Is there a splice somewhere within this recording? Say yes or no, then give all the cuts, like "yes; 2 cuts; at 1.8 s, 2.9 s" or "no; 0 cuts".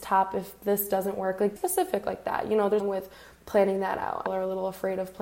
yes; 3 cuts; at 1.6 s, 2.8 s, 4.3 s